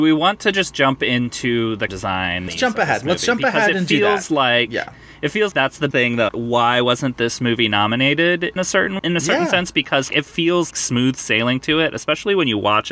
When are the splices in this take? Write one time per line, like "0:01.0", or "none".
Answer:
0:01.9
0:02.5
0:05.5
0:05.9
0:06.3
0:08.6
0:09.0
0:10.1
0:10.7